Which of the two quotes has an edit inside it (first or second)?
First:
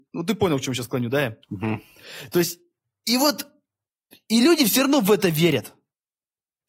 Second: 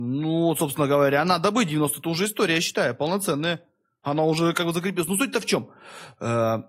first